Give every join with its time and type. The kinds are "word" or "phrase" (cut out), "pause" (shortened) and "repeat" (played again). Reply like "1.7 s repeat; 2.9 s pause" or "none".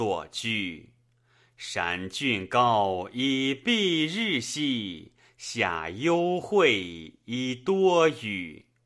none